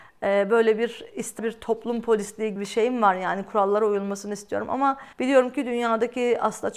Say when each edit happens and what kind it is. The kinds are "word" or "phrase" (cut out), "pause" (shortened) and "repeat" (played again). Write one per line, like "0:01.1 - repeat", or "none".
0:01.4 - word
0:02.6 - word
0:05.1 - pause